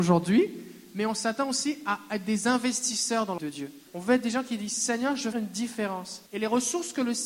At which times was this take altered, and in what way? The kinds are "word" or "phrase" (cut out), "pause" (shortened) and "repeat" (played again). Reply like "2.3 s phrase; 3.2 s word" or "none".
3.4 s phrase; 3.9 s pause; 5.3 s word; 6.3 s pause